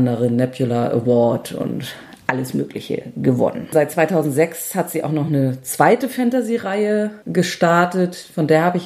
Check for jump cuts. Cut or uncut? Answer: uncut